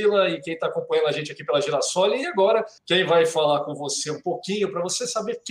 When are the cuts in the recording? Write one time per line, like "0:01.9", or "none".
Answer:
0:02.8